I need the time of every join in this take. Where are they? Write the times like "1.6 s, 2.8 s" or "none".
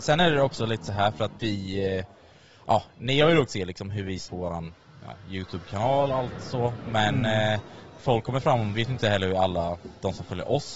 1.4 s, 3.5 s, 4.3 s, 6.1 s, 8.0 s, 8.7 s